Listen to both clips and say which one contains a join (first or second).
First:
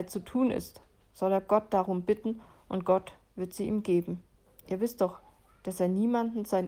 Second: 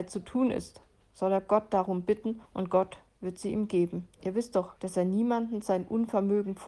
second